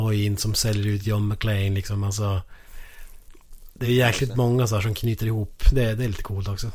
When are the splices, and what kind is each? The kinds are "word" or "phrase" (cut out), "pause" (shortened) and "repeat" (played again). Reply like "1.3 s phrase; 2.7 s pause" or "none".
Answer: none